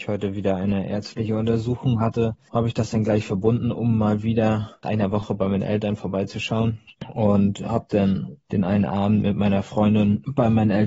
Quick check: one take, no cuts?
yes; 0 cuts

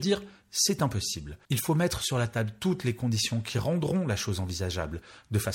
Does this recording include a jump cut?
yes; 1 cut; at 1.4 s

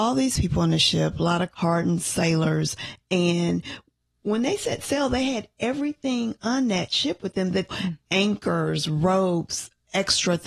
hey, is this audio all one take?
no; 2 cuts; at 1.5 s, 7.7 s

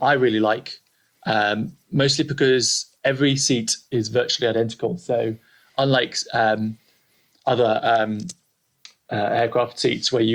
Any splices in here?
no; 0 cuts

